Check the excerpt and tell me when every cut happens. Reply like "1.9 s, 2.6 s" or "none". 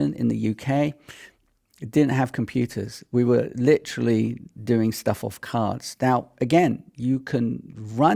none